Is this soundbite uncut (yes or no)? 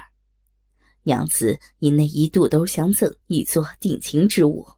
no